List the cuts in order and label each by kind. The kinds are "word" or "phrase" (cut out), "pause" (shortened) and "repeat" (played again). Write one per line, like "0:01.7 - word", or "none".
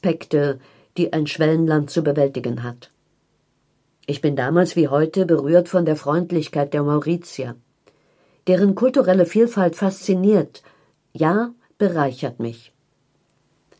none